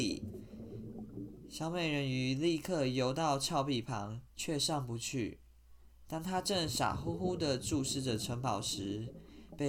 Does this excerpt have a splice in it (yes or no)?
yes